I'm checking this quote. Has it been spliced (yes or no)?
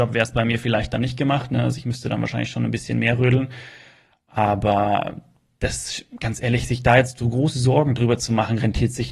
no